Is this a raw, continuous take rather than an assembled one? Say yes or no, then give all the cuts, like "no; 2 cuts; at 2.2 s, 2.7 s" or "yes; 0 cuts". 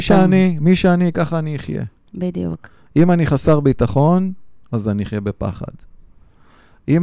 yes; 0 cuts